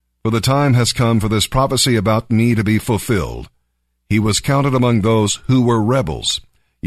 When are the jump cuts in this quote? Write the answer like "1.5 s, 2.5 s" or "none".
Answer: none